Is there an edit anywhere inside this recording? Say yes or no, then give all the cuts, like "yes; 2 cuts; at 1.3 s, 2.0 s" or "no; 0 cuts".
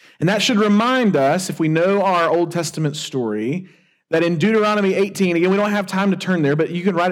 no; 0 cuts